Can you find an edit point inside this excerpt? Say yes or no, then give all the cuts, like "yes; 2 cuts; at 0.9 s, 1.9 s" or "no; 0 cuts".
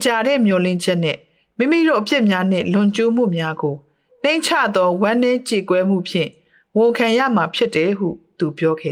no; 0 cuts